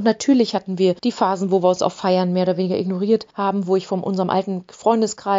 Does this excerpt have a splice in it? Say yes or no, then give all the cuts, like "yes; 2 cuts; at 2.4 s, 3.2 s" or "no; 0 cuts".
yes; 2 cuts; at 1.0 s, 3.3 s